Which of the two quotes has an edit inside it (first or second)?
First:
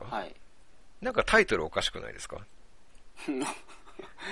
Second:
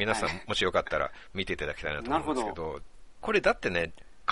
first